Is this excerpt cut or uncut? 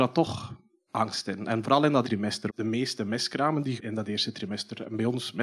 cut